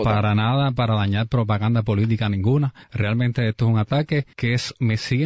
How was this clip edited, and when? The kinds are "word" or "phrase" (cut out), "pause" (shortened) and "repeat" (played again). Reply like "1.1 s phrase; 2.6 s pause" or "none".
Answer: 2.8 s pause; 4.3 s pause